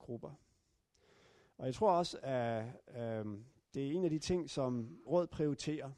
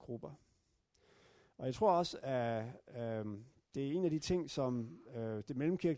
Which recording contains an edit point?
first; 1 cut; at 5.1 s

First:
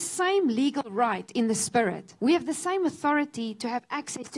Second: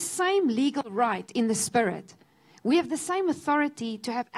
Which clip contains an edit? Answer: first; 1 cut; at 2.2 s

